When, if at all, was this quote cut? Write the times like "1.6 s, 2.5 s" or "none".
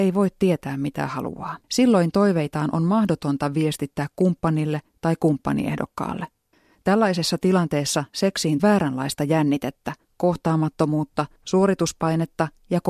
1.6 s, 6.5 s, 8.6 s, 11.4 s